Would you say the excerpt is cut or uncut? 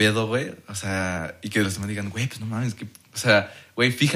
uncut